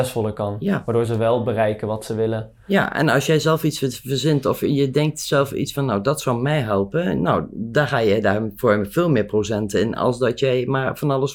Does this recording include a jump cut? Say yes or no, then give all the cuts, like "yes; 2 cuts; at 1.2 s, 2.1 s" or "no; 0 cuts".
no; 0 cuts